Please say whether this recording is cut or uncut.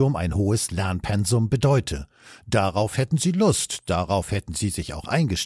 uncut